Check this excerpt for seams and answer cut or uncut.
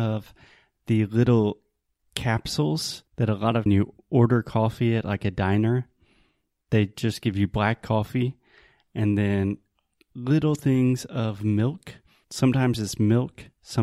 cut